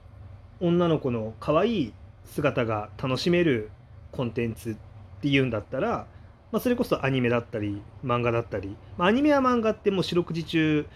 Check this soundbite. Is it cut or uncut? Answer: uncut